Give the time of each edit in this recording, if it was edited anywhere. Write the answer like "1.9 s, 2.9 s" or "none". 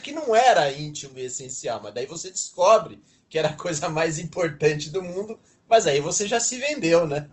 none